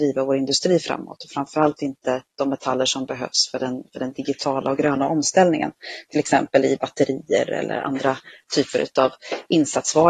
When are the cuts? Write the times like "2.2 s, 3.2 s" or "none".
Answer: none